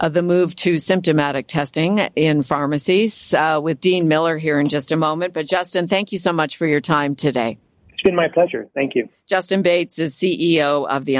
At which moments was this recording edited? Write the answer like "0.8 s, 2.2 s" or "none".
7.7 s